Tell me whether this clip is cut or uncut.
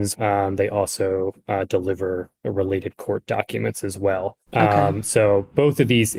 cut